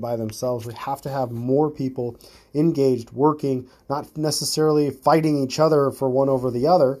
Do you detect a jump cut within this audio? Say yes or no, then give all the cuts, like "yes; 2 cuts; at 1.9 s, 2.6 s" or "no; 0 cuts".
no; 0 cuts